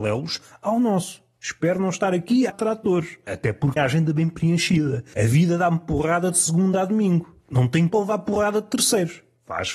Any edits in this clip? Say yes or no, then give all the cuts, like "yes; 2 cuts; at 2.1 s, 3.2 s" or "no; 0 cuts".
yes; 3 cuts; at 2.5 s, 3.8 s, 7.9 s